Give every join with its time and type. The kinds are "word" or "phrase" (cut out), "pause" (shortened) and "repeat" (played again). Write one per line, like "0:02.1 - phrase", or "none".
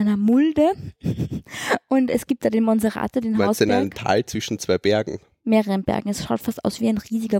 none